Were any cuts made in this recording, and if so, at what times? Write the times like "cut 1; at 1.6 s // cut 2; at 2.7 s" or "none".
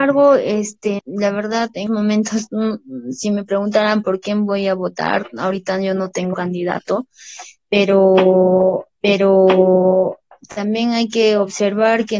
cut 1; at 1.0 s // cut 2; at 1.9 s // cut 3; at 6.3 s // cut 4; at 9.0 s